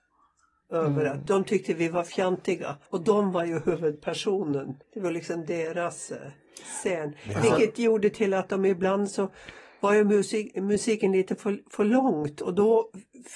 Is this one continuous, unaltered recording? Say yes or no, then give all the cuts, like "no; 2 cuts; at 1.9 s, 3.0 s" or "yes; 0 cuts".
no; 2 cuts; at 2.9 s, 4.8 s